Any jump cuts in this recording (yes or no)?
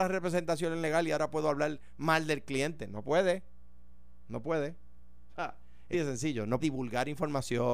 yes